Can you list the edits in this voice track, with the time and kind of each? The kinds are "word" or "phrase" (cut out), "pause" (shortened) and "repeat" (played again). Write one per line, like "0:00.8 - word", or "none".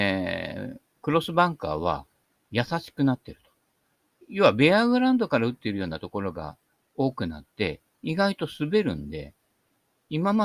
none